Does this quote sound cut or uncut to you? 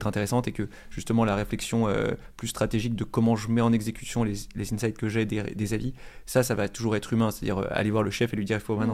uncut